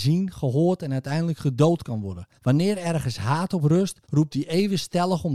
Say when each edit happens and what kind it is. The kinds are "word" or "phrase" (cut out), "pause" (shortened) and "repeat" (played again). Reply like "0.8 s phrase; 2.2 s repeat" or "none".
2.4 s pause; 4.0 s pause